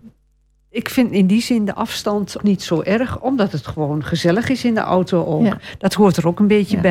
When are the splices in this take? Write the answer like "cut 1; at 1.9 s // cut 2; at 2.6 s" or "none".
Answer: cut 1; at 2.4 s